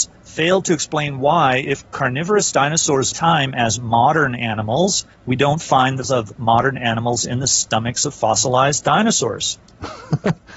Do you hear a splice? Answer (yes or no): yes